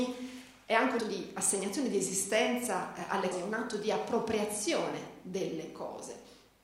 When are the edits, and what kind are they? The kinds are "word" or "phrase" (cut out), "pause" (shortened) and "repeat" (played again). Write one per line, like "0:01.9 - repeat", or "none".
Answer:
0:01.0 - word
0:03.3 - word